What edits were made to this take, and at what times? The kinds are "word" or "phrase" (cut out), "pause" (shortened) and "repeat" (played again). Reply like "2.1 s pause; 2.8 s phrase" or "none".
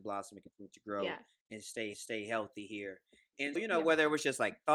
1.9 s repeat; 3.6 s word